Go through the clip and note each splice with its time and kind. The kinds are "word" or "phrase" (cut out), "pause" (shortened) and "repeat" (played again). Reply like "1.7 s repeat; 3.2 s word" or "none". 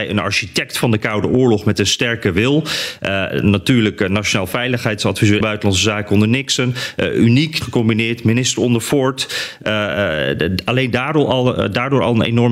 5.4 s phrase; 7.6 s phrase